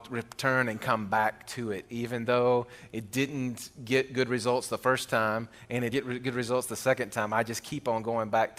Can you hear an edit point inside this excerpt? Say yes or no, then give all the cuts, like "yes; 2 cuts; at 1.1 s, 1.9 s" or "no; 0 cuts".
yes; 1 cut; at 5.9 s